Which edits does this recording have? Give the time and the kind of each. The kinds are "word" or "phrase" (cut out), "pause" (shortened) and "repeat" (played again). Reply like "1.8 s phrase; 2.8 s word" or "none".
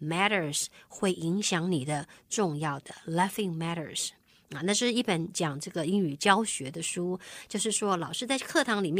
none